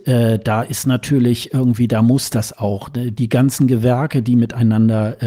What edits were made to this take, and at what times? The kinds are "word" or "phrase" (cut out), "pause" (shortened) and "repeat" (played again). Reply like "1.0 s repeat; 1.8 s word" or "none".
none